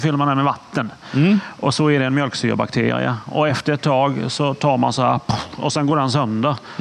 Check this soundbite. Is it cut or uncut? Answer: uncut